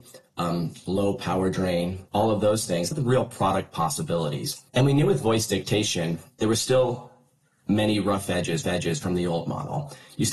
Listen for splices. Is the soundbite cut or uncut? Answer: cut